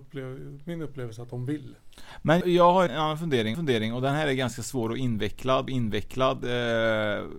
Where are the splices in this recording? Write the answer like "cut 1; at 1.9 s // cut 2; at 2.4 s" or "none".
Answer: cut 1; at 2.4 s // cut 2; at 2.9 s // cut 3; at 3.5 s // cut 4; at 5.7 s

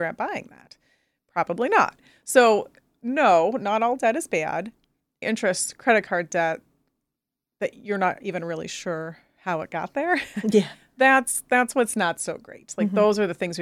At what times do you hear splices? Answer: cut 1; at 5.2 s

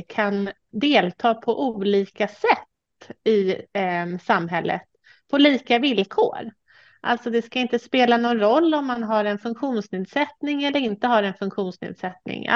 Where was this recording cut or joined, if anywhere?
none

